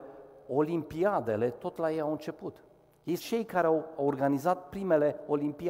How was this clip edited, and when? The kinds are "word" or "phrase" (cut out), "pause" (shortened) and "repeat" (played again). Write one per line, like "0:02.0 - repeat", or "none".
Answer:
0:03.2 - word